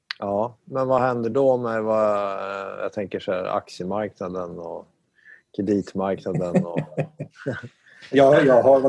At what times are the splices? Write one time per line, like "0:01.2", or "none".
none